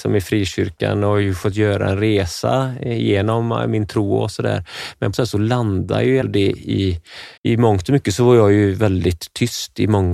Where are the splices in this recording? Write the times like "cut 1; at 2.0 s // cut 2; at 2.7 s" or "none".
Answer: cut 1; at 5.1 s // cut 2; at 6.2 s // cut 3; at 7.4 s